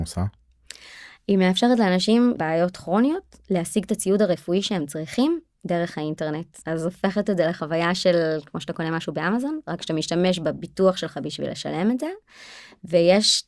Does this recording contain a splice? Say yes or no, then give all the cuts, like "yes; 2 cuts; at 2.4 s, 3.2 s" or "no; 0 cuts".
yes; 2 cuts; at 2.4 s, 6.6 s